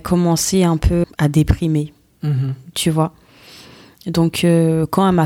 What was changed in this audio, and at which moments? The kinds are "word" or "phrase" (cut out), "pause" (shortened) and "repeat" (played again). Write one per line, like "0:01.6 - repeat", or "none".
0:01.0 - word

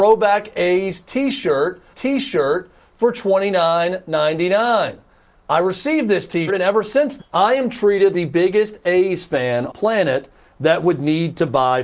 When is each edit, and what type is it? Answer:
0:01.9 - repeat
0:06.5 - word
0:07.2 - word
0:08.1 - word
0:09.7 - phrase

